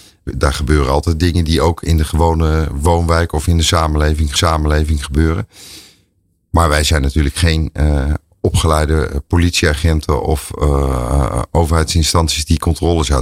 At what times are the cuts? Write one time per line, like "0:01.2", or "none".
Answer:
0:04.4